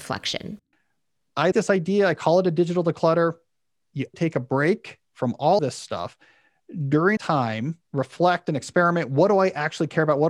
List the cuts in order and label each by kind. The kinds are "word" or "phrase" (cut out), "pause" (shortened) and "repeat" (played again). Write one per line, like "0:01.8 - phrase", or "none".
0:01.5 - word
0:04.1 - word
0:05.0 - pause
0:05.6 - word
0:07.2 - word
0:07.8 - pause